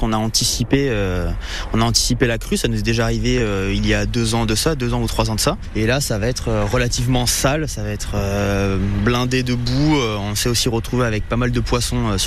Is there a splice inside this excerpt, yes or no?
no